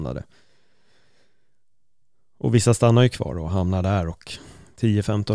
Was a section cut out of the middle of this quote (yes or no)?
no